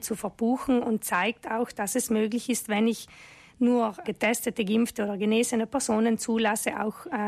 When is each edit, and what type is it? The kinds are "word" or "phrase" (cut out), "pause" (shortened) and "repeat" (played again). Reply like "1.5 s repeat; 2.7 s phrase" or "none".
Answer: 4.0 s word